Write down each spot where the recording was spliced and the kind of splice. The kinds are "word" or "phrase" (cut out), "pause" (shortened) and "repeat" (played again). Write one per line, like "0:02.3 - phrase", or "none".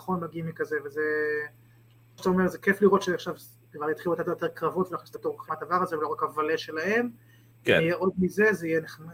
0:02.2 - word
0:05.1 - word
0:05.5 - word